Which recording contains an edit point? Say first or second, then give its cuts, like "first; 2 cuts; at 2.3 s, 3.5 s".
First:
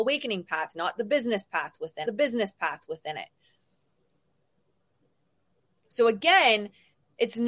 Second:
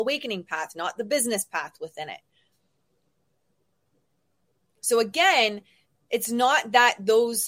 first; 1 cut; at 2.1 s